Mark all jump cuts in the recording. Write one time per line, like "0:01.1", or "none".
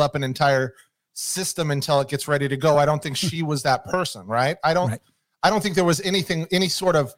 none